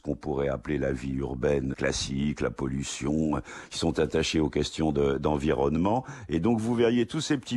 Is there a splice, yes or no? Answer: yes